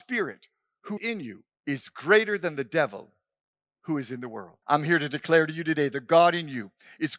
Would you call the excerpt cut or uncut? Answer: cut